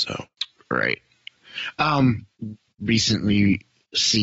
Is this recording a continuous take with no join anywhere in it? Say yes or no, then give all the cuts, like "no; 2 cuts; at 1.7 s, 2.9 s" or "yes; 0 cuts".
no; 1 cut; at 2.7 s